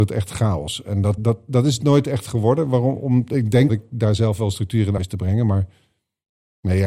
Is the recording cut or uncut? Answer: cut